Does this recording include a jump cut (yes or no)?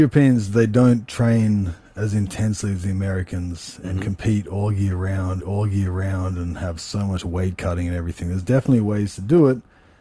yes